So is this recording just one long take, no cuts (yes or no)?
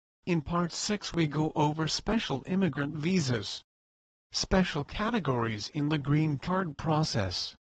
yes